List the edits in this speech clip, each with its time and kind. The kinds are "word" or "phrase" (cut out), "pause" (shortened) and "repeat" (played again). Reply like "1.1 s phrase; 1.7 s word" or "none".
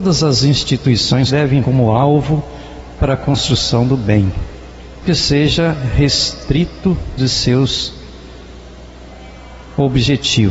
1.3 s word; 1.6 s word; 3.0 s word; 5.0 s word; 7.2 s word